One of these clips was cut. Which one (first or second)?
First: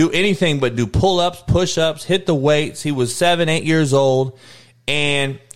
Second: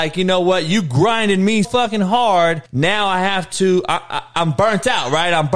second